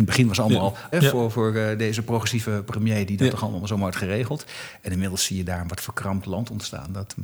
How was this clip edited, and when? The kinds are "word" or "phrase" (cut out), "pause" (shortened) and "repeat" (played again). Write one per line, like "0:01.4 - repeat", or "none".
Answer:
0:00.9 - phrase